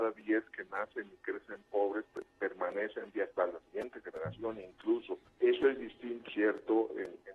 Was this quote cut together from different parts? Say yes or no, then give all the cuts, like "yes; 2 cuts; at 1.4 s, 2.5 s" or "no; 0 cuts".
yes; 3 cuts; at 3.1 s, 5.3 s, 6.3 s